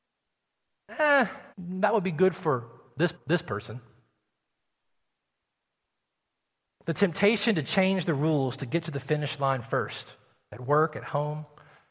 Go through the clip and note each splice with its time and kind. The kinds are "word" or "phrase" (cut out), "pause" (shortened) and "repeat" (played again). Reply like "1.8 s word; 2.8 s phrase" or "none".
1.5 s pause; 3.1 s repeat